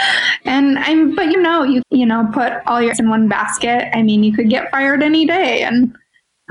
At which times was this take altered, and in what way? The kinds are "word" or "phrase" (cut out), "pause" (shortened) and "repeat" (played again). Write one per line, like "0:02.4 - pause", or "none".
0:01.3 - word
0:01.8 - word
0:02.9 - word